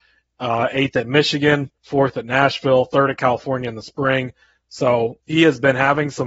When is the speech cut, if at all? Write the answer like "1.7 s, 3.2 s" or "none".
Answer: 1.8 s, 5.2 s